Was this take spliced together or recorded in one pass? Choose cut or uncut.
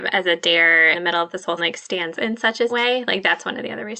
cut